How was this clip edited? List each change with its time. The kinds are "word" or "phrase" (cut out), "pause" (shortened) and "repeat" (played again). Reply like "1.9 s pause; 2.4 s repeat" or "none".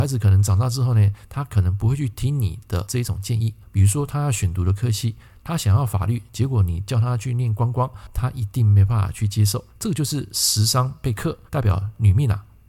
3.6 s pause; 9.7 s pause; 11.5 s pause